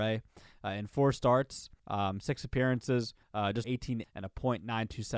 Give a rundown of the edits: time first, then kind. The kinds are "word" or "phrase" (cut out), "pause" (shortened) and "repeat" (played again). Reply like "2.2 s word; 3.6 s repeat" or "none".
1.8 s pause; 3.2 s pause; 3.6 s word; 4.0 s phrase